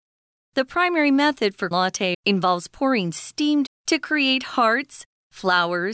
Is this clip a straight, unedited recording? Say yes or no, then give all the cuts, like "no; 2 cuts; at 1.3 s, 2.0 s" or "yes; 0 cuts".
no; 3 cuts; at 1.7 s, 2.1 s, 3.7 s